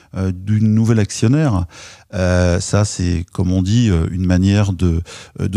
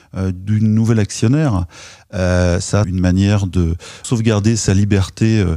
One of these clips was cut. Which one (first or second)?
second